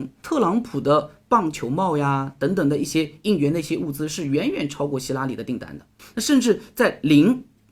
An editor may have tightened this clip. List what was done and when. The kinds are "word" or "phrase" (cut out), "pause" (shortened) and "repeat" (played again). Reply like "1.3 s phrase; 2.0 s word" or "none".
6.0 s pause